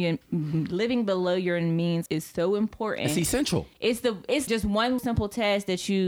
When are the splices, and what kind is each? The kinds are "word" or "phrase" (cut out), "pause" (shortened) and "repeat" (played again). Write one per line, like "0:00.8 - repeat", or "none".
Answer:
0:02.1 - word
0:03.7 - pause
0:04.5 - word
0:05.0 - word